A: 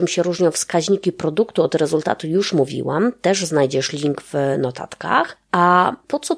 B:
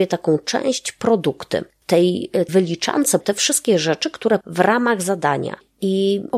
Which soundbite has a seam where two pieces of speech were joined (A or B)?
B